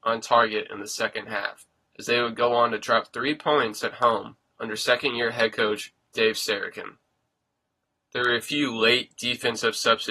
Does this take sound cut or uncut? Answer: uncut